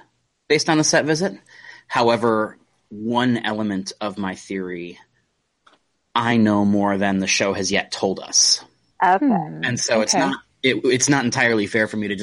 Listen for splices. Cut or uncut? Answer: uncut